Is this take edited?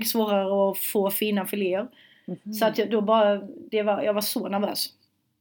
no; 0 cuts

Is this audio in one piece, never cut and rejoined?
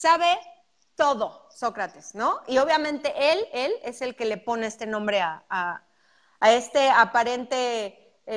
yes; 0 cuts

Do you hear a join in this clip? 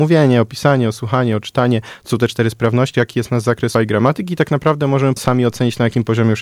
yes; 3 cuts; at 2.9 s, 3.7 s, 5.2 s

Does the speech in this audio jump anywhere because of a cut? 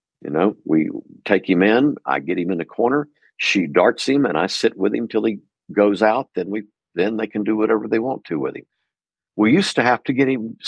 no; 0 cuts

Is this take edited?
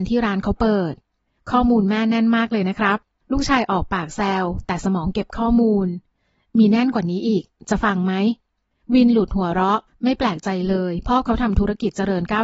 no; 0 cuts

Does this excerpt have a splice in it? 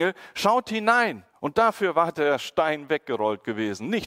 yes; 1 cut; at 1.3 s

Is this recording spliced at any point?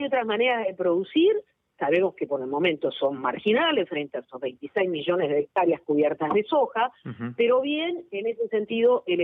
no; 0 cuts

